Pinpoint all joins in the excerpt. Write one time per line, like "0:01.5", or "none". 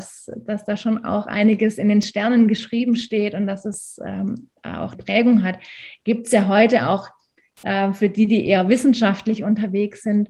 0:04.9